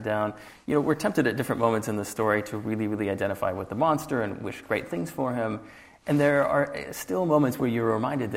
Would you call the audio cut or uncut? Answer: uncut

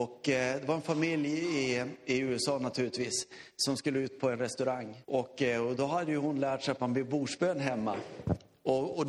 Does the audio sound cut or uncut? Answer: cut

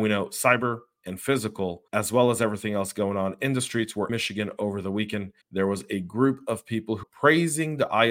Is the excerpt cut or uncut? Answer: cut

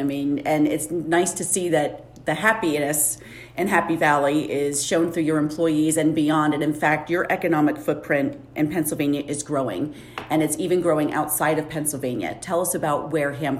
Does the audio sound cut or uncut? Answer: uncut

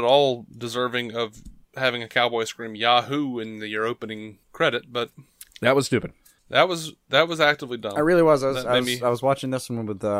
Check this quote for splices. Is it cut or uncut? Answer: uncut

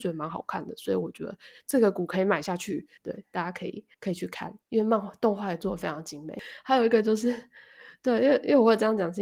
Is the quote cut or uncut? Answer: cut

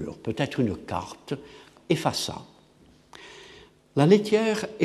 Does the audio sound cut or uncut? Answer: cut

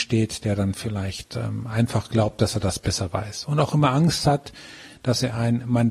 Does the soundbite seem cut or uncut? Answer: uncut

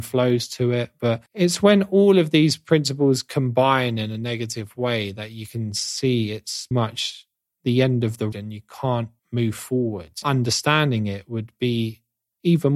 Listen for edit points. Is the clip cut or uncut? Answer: cut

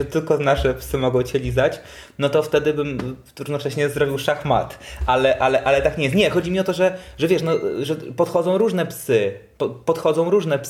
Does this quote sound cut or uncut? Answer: uncut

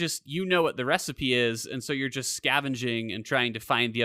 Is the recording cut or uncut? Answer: uncut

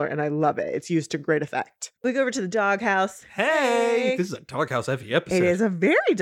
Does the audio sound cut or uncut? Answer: cut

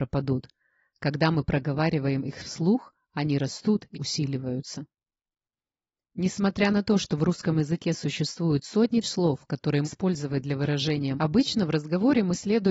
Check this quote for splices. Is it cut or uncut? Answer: cut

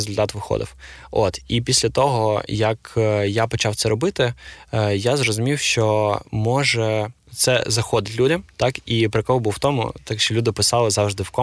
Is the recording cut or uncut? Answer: uncut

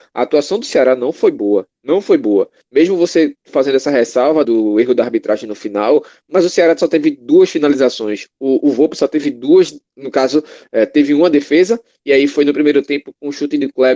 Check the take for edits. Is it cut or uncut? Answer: cut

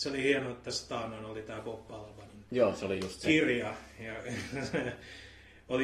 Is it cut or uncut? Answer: uncut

